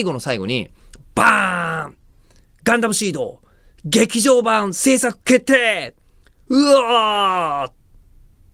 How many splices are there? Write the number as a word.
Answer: zero